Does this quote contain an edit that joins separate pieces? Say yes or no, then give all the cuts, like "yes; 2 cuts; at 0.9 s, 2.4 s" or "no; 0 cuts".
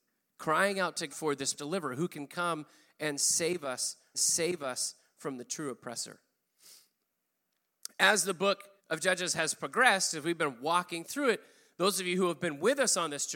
yes; 4 cuts; at 1.1 s, 1.6 s, 4.1 s, 8.8 s